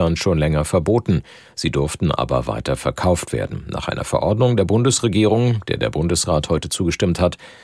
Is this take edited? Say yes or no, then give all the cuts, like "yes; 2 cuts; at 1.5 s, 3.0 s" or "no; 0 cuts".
no; 0 cuts